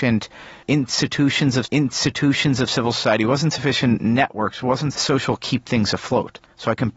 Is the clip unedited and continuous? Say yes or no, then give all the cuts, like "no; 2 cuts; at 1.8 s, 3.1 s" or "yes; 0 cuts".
no; 3 cuts; at 1.6 s, 4.9 s, 5.4 s